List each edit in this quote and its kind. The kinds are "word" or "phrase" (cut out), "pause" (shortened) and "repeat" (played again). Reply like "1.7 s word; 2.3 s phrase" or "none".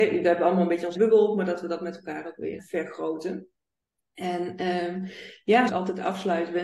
0.9 s word; 2.6 s word; 5.7 s phrase